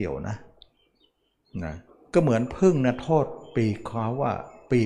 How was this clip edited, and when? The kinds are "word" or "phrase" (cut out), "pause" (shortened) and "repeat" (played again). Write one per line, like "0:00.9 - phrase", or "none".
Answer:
0:01.9 - pause